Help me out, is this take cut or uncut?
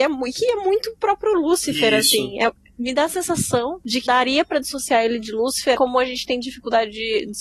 cut